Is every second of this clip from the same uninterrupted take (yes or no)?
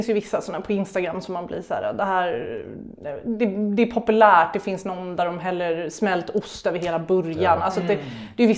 yes